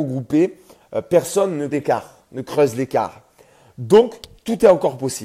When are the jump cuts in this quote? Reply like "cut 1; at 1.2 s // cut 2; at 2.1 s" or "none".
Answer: cut 1; at 1.7 s